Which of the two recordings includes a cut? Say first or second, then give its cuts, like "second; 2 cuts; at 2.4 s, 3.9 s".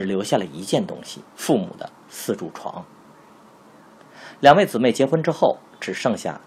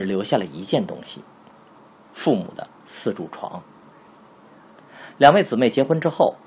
first; 1 cut; at 1.3 s